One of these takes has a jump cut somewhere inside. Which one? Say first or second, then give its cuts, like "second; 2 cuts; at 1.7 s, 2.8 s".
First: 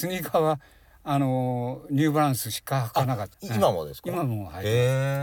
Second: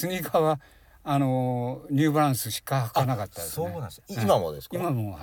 first; 1 cut; at 3.3 s